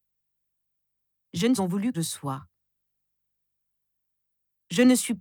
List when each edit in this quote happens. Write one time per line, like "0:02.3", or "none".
0:01.6
0:01.9